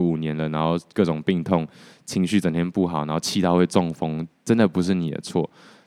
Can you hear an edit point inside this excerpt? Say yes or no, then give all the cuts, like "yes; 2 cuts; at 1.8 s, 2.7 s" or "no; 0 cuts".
no; 0 cuts